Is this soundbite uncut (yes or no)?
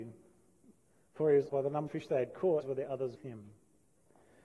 no